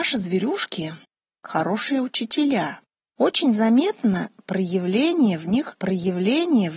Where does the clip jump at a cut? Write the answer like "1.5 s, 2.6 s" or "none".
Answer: 1.0 s, 3.1 s, 5.7 s

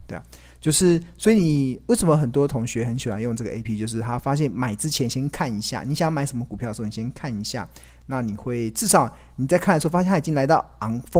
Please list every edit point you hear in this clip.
3.6 s

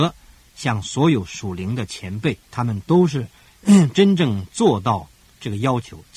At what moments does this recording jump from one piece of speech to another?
2.4 s

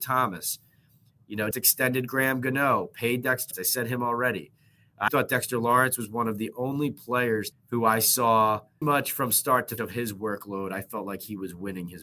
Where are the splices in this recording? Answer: 1.5 s, 3.5 s, 5.1 s, 7.5 s, 8.8 s, 9.8 s

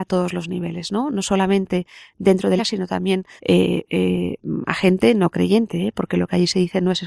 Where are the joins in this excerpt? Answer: 2.6 s, 3.4 s

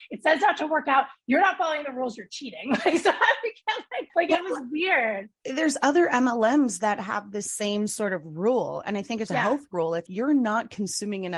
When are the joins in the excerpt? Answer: 9.3 s, 10.1 s

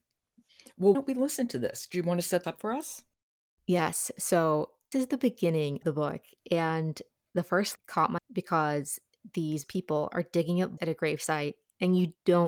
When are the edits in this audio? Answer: 0.9 s, 2.4 s, 4.9 s, 5.8 s, 7.7 s, 8.2 s, 9.6 s, 10.8 s

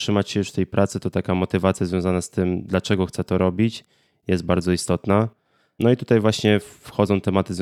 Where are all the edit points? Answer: none

